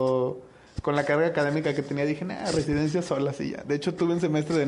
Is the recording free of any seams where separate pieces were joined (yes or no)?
yes